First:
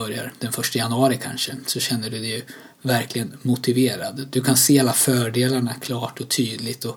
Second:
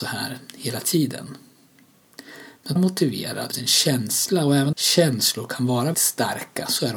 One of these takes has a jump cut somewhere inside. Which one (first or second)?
second